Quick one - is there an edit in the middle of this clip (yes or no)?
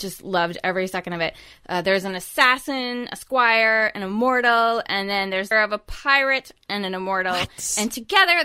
yes